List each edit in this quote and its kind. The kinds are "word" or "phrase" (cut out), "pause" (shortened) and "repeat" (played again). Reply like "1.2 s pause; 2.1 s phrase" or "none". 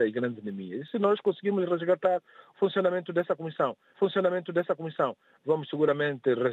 3.9 s repeat